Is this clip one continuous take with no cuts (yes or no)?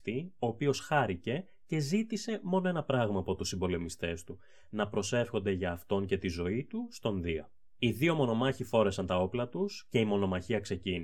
yes